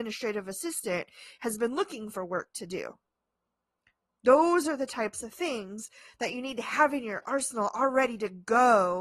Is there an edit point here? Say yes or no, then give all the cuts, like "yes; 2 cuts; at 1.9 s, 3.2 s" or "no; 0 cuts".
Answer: no; 0 cuts